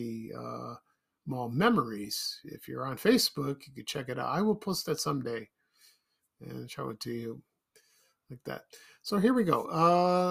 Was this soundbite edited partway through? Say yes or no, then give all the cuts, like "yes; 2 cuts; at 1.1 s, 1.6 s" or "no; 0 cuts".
no; 0 cuts